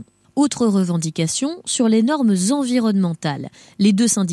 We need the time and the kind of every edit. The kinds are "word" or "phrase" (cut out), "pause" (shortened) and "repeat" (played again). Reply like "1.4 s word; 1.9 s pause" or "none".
none